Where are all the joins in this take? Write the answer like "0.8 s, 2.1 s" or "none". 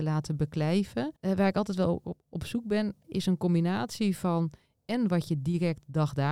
1.2 s, 3.0 s